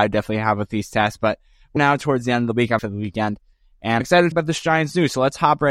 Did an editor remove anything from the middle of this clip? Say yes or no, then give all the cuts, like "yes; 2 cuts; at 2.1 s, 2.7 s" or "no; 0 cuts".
yes; 4 cuts; at 1.8 s, 2.8 s, 4.0 s, 4.3 s